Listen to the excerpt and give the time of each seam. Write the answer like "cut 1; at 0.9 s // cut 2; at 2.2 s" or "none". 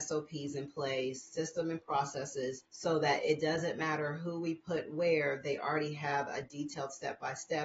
none